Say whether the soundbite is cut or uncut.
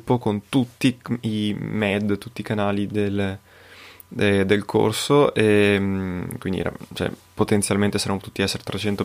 uncut